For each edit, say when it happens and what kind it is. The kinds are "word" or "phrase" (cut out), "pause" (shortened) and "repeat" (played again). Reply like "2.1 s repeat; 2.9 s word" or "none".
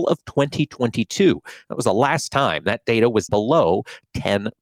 3.3 s word